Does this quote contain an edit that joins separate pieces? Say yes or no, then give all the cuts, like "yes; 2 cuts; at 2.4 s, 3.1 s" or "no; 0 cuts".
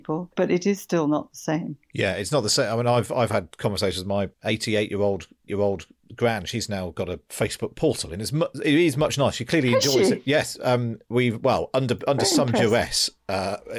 yes; 1 cut; at 5.5 s